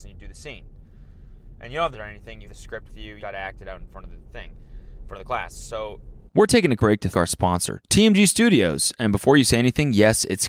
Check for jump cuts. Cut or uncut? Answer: cut